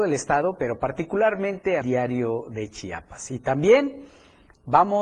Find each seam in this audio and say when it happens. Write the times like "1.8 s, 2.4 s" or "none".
1.8 s